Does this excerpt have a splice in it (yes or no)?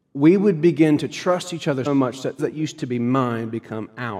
yes